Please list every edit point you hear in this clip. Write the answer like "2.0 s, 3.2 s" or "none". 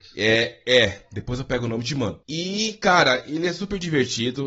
2.2 s